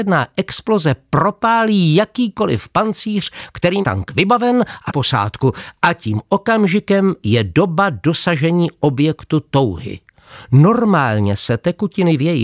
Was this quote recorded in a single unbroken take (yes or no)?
no